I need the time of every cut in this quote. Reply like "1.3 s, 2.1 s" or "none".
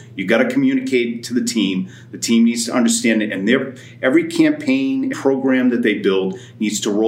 5.1 s